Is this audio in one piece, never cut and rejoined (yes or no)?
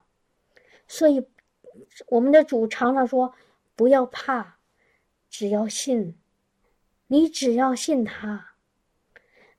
no